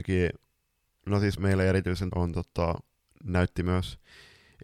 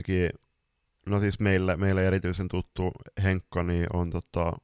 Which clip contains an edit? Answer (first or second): first